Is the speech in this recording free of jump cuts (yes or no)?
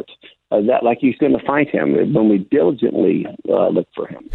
no